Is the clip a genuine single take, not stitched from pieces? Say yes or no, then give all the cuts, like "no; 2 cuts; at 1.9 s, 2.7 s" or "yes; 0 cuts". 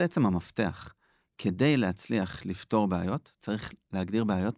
yes; 0 cuts